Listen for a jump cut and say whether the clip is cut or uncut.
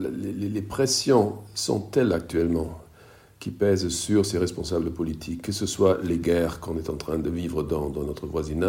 uncut